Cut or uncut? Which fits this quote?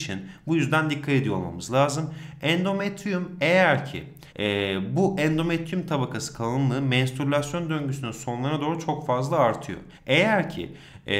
cut